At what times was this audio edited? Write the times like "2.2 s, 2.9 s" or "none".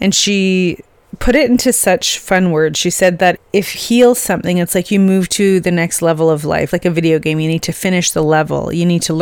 3.4 s, 3.7 s, 6.7 s